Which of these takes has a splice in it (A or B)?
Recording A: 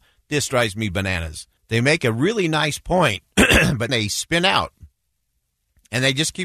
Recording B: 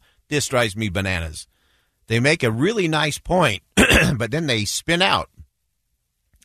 A